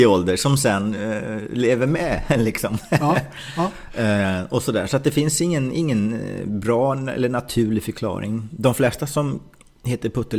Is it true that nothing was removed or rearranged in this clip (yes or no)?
yes